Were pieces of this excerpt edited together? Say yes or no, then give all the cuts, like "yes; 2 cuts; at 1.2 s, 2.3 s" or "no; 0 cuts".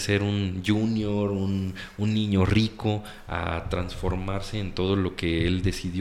no; 0 cuts